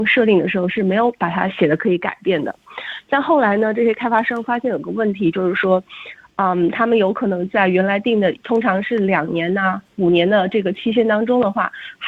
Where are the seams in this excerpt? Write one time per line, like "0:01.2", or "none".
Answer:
none

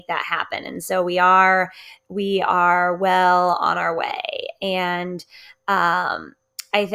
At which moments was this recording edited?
none

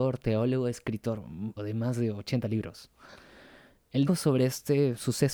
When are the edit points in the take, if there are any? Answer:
0:01.6
0:04.1

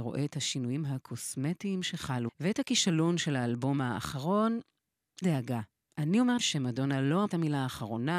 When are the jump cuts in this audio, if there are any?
0:02.3
0:05.2
0:06.4
0:07.3

